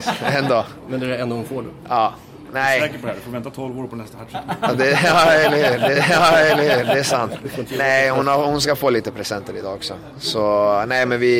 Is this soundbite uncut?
no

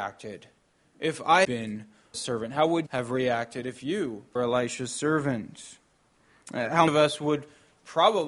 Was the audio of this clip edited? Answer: yes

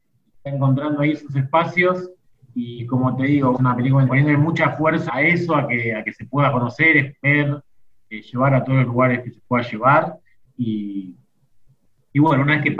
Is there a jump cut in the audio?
yes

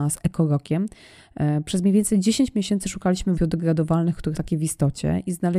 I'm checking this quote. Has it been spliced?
yes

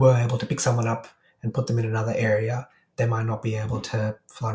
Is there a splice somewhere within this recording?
no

